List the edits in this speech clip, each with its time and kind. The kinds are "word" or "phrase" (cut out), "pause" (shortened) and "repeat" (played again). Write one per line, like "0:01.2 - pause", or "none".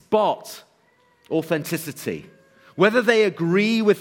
none